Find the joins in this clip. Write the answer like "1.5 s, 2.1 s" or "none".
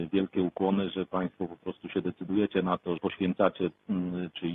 3.0 s

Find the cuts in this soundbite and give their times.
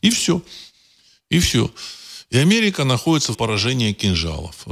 3.3 s

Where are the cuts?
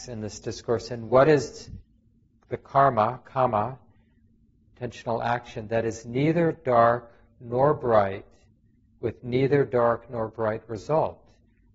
none

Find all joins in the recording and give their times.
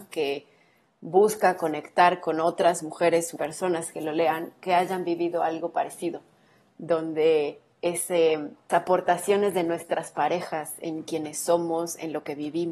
3.4 s, 8.7 s

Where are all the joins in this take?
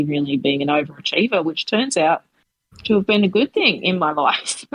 none

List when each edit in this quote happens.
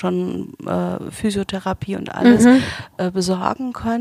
none

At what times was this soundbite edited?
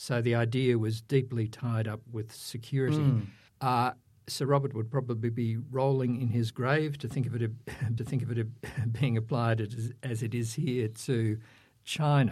3.5 s, 8.0 s

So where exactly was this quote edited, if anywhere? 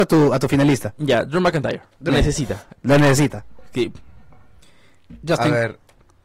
2.1 s

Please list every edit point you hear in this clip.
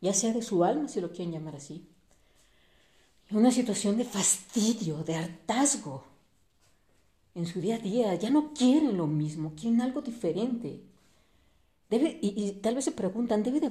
none

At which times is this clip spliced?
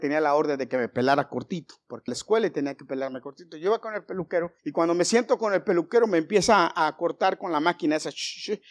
2.1 s, 4.6 s

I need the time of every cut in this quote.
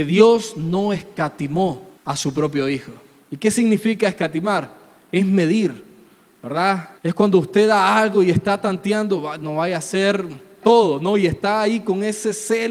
2.0 s, 7.0 s, 10.6 s

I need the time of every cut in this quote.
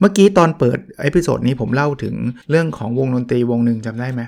2.4 s

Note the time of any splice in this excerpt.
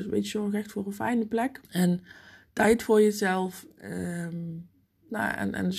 1.6 s

